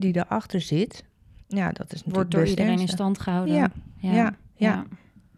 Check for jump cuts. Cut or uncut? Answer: uncut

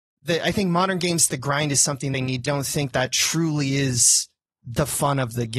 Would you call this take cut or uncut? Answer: cut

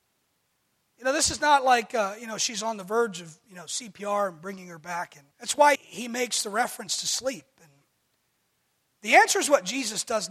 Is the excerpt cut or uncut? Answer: cut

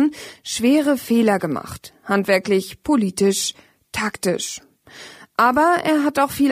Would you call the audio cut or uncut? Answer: uncut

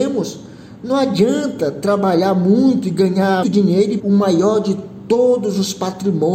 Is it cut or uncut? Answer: cut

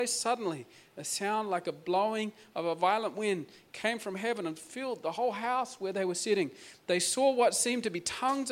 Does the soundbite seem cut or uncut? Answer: uncut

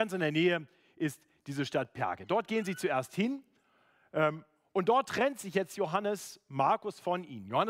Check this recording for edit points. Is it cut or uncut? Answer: uncut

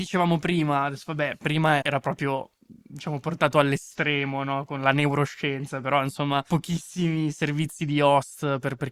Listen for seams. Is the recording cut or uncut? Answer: cut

